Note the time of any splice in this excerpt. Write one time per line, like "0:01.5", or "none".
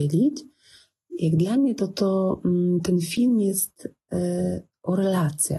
none